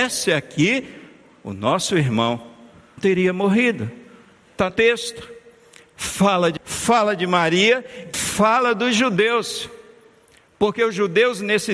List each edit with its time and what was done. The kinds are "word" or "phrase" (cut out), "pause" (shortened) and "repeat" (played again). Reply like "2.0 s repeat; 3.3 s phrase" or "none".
3.0 s word; 4.7 s word; 6.6 s word; 8.1 s word